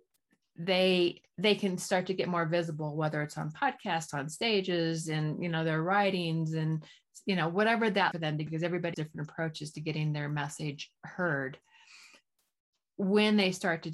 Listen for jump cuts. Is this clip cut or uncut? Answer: cut